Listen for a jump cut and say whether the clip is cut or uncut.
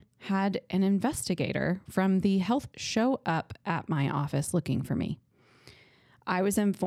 cut